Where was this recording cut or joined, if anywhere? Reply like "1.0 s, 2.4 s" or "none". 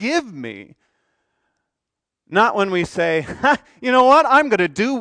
none

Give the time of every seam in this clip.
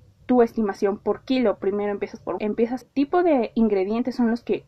2.4 s, 2.8 s

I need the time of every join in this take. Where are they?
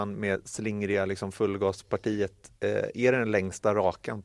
2.6 s

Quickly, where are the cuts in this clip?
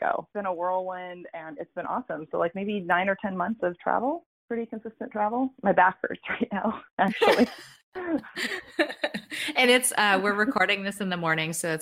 none

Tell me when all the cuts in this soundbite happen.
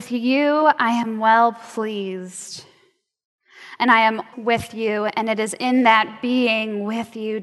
4.3 s

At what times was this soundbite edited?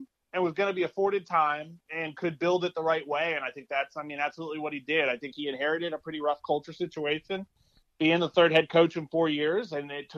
1.9 s

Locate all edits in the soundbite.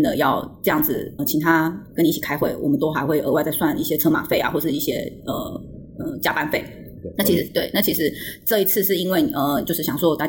1.2 s

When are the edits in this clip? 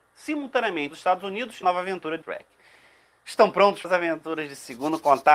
0.9 s, 1.6 s, 2.2 s, 3.8 s

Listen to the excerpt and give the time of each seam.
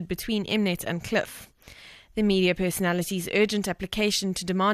none

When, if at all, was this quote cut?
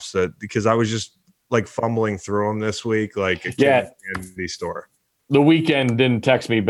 none

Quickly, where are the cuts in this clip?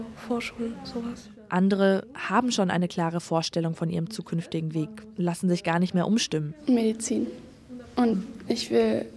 none

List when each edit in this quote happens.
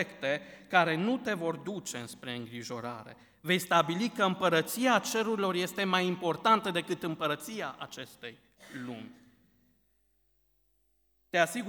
none

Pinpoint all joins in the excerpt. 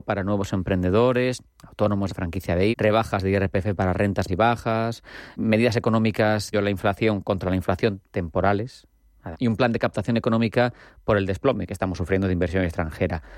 2.1 s, 2.7 s, 4.3 s, 5.4 s, 6.5 s, 9.3 s

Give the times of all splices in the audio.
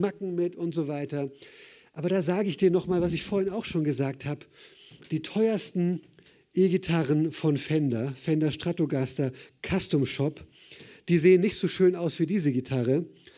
none

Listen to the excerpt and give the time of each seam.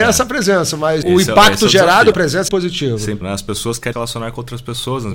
1.0 s, 2.1 s, 2.5 s, 3.2 s, 3.9 s

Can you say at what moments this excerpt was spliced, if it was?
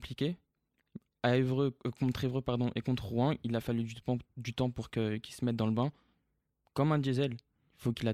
none

